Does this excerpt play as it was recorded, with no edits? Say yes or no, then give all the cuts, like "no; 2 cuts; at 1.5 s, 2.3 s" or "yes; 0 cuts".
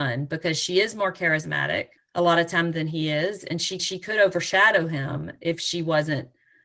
no; 2 cuts; at 2.0 s, 3.8 s